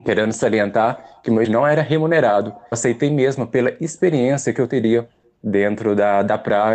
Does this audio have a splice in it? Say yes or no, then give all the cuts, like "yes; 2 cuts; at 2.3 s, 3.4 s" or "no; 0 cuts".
yes; 2 cuts; at 1.4 s, 2.7 s